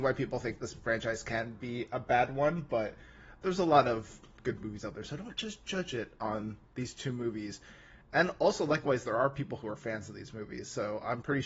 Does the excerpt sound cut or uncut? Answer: uncut